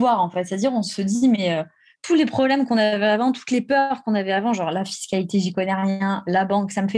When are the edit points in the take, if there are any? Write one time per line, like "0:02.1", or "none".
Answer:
none